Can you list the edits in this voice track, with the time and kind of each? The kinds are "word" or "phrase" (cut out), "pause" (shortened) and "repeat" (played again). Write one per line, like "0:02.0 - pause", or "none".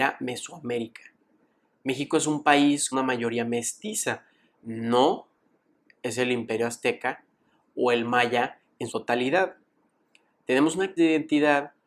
0:02.9 - word
0:08.9 - word
0:11.0 - word